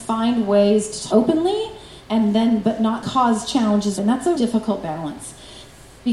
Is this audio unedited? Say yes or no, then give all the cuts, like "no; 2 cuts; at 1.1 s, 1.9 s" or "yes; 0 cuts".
no; 5 cuts; at 1.1 s, 2.0 s, 3.0 s, 4.0 s, 4.3 s